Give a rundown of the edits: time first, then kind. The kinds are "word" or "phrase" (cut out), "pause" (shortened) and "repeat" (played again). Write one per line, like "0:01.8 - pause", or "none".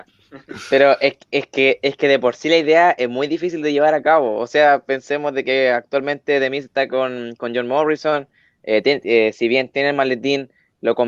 none